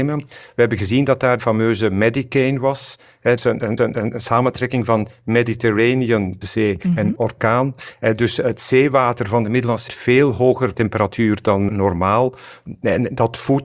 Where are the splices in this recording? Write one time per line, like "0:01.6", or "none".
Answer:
0:01.4
0:03.4
0:03.8
0:06.4
0:07.2
0:09.9
0:10.7
0:11.7